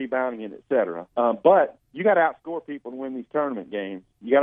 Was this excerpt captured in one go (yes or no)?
no